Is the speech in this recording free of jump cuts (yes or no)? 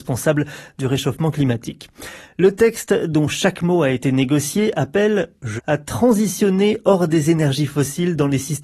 no